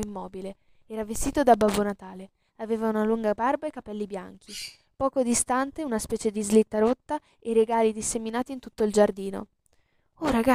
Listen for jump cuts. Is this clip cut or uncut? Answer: uncut